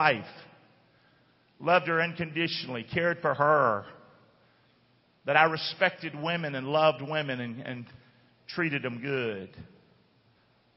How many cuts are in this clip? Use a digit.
0